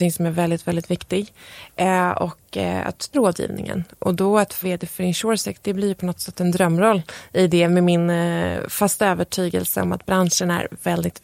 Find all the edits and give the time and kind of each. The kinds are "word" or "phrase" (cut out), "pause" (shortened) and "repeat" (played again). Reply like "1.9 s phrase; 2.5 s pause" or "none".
3.1 s word; 4.6 s word